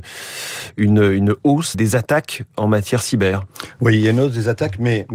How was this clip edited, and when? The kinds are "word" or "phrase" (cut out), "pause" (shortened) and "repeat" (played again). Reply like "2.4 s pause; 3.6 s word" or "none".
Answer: 1.7 s word